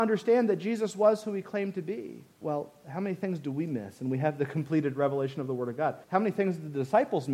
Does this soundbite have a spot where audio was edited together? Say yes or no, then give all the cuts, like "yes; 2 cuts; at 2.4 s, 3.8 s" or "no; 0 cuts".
yes; 2 cuts; at 2.3 s, 6.0 s